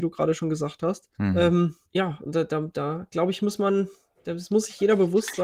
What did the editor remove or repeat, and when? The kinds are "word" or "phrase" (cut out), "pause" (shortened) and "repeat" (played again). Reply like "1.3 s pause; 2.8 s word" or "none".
1.1 s pause; 1.9 s pause